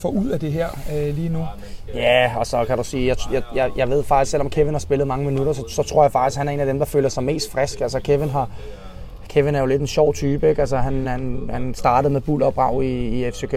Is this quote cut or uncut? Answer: uncut